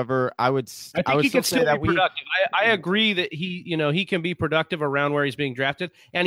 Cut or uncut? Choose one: uncut